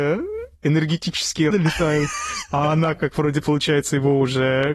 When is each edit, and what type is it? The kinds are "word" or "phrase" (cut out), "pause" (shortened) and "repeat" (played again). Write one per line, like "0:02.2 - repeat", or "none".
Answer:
0:01.5 - word